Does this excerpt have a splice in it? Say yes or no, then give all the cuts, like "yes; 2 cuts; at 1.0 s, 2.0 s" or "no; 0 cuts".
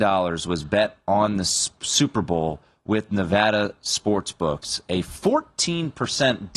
no; 0 cuts